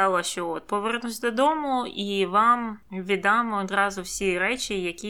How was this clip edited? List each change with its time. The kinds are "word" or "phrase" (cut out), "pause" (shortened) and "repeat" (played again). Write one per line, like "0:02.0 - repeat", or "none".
0:02.8 - pause